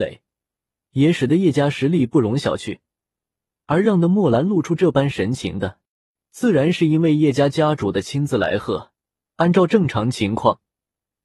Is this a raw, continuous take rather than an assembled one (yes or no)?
yes